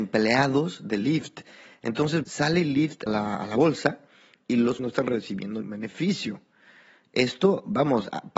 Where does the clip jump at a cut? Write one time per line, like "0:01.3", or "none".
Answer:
0:02.2
0:03.1
0:04.8
0:05.6